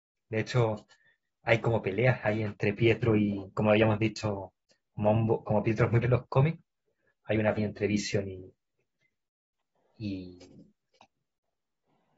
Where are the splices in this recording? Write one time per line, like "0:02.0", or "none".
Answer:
0:06.0
0:07.6